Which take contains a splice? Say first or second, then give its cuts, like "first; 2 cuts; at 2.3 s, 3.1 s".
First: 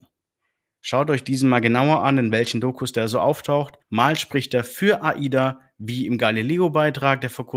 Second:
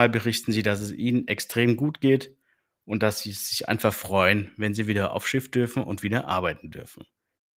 first; 1 cut; at 3.8 s